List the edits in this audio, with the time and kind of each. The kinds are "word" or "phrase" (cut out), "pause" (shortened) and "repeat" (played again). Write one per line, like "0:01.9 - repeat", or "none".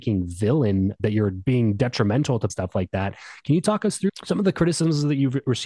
0:02.5 - phrase